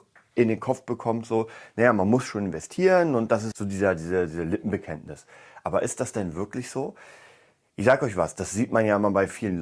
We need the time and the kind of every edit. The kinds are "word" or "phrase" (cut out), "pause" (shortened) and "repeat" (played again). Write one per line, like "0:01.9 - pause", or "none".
0:03.5 - word